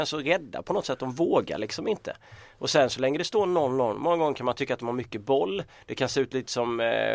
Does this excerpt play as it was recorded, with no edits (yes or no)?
yes